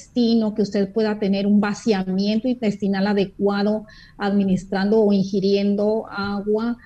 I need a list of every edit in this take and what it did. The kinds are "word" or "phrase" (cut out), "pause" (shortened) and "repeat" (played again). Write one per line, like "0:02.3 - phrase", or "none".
none